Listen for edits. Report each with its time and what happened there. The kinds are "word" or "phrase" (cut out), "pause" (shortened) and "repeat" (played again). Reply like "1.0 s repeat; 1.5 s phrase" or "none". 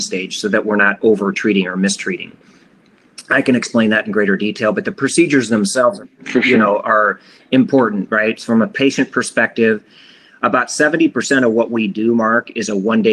none